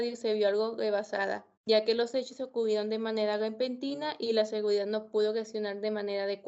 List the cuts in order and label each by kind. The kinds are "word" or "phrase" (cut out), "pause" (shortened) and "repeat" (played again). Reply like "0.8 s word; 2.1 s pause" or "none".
1.6 s pause